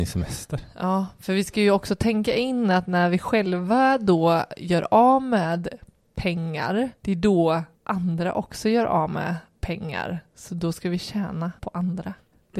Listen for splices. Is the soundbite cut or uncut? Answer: cut